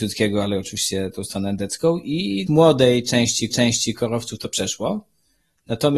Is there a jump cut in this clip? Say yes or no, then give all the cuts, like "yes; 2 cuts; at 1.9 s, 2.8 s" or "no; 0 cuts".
yes; 2 cuts; at 2.5 s, 3.5 s